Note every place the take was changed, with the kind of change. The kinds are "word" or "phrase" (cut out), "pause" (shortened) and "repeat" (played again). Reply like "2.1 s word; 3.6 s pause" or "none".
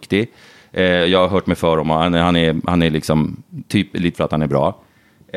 4.1 s word